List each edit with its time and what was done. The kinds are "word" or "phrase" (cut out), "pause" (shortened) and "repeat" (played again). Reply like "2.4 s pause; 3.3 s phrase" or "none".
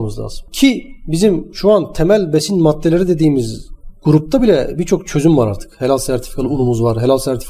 none